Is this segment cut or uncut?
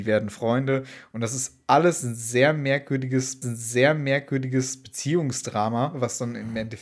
cut